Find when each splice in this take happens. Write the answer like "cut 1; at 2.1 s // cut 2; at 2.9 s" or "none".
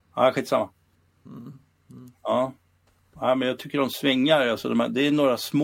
none